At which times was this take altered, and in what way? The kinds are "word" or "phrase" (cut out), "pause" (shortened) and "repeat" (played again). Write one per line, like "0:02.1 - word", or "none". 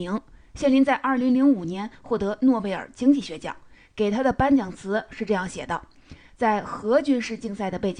none